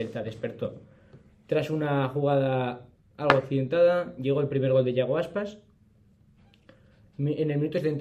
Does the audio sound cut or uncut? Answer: uncut